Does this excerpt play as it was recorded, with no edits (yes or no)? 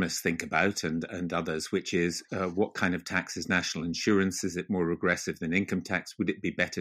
yes